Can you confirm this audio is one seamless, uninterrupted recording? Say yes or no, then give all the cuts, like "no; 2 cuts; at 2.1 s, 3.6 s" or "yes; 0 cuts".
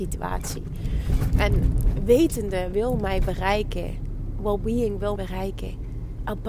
no; 2 cuts; at 2.7 s, 5.2 s